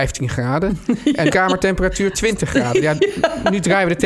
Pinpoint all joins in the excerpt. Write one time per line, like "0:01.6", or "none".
0:01.3